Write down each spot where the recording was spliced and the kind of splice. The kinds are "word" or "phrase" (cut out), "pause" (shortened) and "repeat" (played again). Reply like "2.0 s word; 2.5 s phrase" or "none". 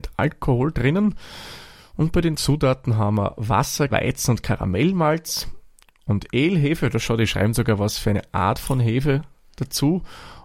3.9 s word